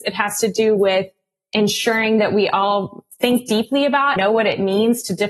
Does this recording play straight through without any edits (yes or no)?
no